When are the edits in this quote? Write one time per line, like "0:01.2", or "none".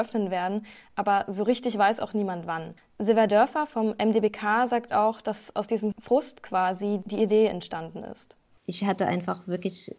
none